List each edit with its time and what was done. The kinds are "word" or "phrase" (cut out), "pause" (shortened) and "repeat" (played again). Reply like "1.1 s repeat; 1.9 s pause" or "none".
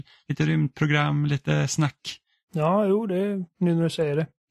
none